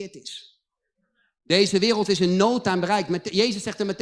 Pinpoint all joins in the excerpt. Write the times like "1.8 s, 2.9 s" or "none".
none

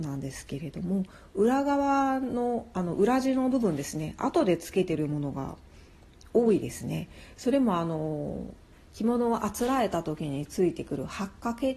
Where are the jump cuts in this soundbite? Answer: none

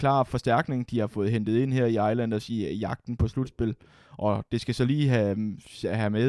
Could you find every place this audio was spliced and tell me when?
none

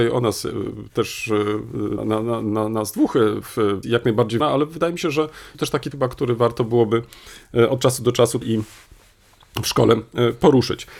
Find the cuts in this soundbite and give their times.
2.0 s, 3.8 s, 4.4 s, 5.5 s, 5.9 s, 8.4 s

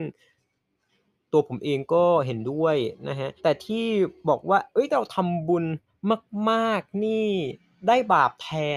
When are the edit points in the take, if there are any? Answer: 3.4 s

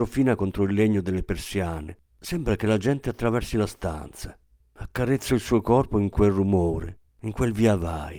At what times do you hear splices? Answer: 2.1 s, 4.6 s, 7.1 s

